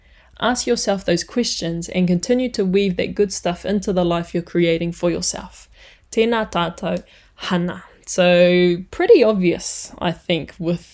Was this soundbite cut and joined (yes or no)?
no